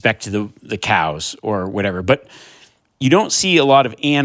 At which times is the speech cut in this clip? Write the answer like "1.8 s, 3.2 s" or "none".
none